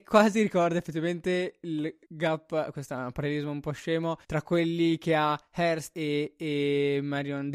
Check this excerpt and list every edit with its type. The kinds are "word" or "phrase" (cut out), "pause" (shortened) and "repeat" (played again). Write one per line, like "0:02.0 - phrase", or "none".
0:02.0 - pause
0:04.2 - pause
0:05.9 - word